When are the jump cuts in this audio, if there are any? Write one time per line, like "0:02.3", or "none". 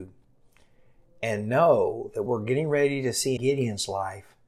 0:02.3
0:03.4